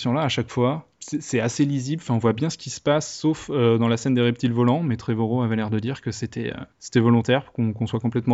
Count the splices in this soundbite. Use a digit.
2